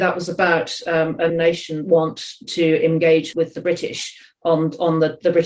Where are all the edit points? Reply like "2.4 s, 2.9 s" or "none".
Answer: 1.3 s, 1.8 s, 3.3 s